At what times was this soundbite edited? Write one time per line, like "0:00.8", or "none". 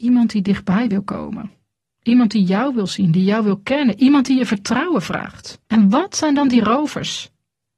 0:01.8
0:05.6